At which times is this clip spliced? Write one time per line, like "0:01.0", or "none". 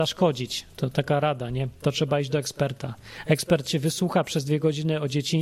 none